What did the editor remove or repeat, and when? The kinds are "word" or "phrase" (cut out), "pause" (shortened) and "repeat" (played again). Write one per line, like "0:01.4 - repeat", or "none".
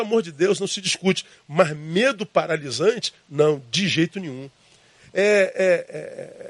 none